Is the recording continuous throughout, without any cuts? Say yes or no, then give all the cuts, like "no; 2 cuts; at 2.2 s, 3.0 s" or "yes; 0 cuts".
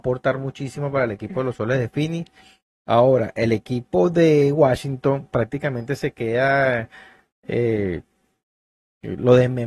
yes; 0 cuts